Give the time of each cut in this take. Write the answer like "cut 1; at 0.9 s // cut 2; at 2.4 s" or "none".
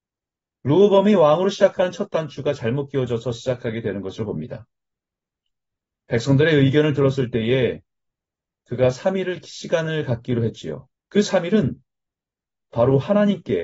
cut 1; at 11.0 s

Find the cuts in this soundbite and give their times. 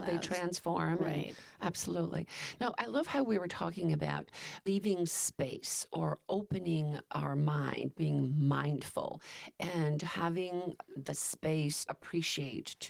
cut 1; at 4.7 s // cut 2; at 11.9 s

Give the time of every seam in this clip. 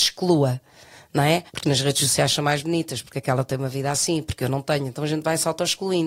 cut 1; at 1.5 s

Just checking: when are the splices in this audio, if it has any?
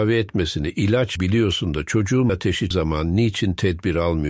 cut 1; at 1.2 s // cut 2; at 2.3 s // cut 3; at 2.7 s

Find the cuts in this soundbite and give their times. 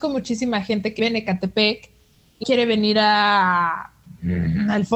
cut 1; at 1.0 s // cut 2; at 2.4 s

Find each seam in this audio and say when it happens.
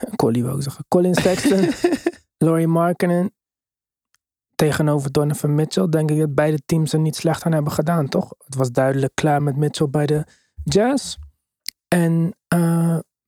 none

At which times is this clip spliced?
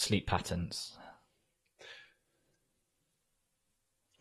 none

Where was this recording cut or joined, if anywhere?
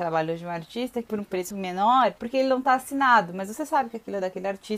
cut 1; at 1.5 s

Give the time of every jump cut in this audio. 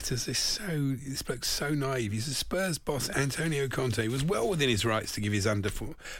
none

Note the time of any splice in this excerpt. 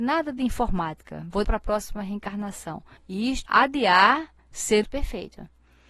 cut 1; at 1.4 s // cut 2; at 3.0 s // cut 3; at 3.5 s // cut 4; at 4.4 s // cut 5; at 4.8 s

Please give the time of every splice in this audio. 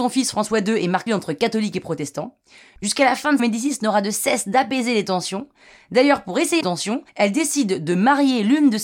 cut 1; at 1.1 s // cut 2; at 3.4 s // cut 3; at 6.6 s // cut 4; at 7.1 s

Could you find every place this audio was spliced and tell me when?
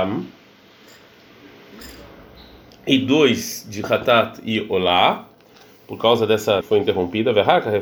cut 1; at 6.6 s

